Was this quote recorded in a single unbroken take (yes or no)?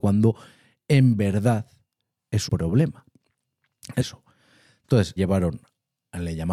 no